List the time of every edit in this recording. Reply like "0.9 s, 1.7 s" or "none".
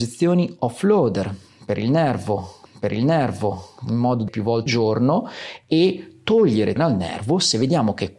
2.7 s, 4.3 s, 4.7 s, 6.8 s